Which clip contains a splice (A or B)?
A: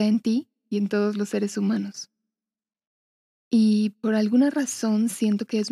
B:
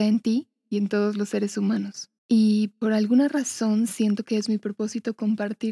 B